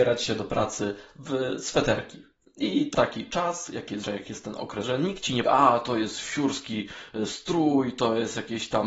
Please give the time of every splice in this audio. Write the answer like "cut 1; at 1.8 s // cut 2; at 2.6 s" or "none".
cut 1; at 2.9 s // cut 2; at 4.0 s // cut 3; at 4.8 s // cut 4; at 5.5 s